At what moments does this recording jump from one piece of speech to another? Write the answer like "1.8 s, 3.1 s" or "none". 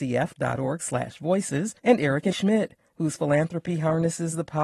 1.8 s, 2.3 s